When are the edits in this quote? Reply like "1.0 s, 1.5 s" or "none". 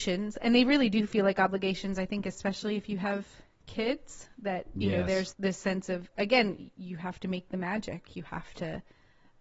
5.3 s